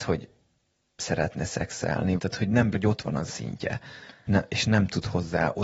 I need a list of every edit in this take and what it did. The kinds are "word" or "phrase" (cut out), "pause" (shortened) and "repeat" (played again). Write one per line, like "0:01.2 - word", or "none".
0:01.0 - word
0:02.2 - word
0:02.7 - word
0:03.3 - word
0:04.3 - word